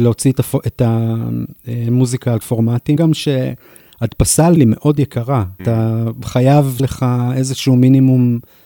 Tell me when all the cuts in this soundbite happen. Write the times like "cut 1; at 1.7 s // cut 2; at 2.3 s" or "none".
cut 1; at 2.4 s // cut 2; at 3.0 s // cut 3; at 4.6 s // cut 4; at 5.6 s // cut 5; at 6.8 s